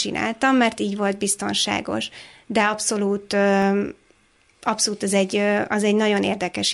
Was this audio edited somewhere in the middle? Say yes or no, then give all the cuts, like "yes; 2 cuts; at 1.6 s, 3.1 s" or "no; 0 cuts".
no; 0 cuts